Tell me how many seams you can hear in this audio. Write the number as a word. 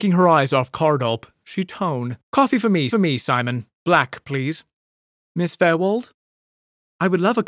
three